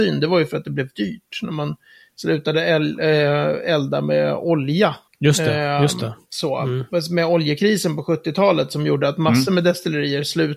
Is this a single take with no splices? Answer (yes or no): yes